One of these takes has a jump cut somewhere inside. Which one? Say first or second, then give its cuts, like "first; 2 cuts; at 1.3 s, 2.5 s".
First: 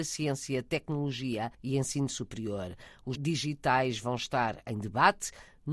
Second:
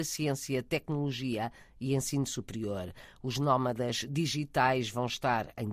first; 2 cuts; at 1.5 s, 3.2 s